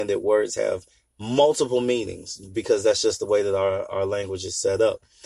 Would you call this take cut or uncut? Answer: uncut